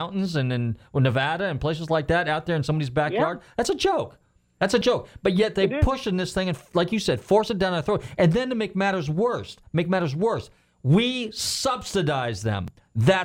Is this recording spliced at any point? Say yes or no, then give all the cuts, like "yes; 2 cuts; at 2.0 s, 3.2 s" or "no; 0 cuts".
no; 0 cuts